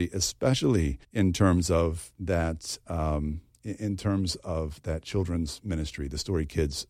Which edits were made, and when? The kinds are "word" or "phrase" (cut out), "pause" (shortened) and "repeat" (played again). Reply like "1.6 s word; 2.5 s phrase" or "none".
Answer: 1.0 s pause

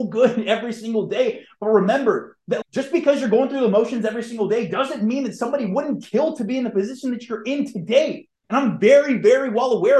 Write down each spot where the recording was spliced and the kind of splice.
2.6 s word; 8.3 s pause

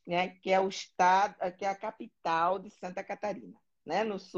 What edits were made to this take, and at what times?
none

